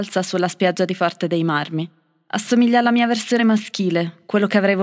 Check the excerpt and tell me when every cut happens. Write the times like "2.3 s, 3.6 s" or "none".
none